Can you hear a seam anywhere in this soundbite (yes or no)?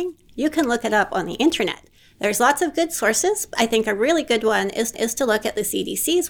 yes